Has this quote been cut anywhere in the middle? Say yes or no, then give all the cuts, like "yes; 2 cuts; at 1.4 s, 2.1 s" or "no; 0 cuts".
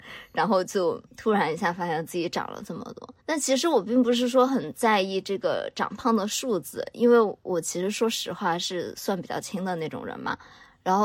yes; 2 cuts; at 1.1 s, 3.2 s